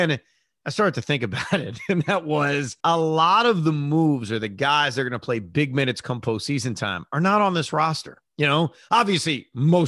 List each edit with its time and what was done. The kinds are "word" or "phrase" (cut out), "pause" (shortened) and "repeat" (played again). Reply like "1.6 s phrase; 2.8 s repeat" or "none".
2.8 s pause; 8.3 s pause